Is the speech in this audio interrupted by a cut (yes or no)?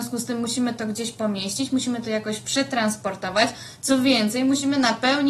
no